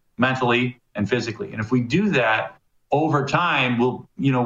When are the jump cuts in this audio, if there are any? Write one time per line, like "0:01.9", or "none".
none